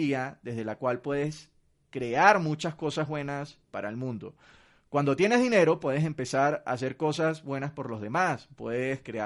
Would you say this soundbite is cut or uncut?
uncut